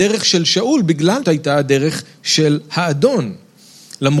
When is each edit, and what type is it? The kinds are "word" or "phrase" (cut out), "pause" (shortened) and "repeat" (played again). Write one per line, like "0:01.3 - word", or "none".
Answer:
0:01.2 - word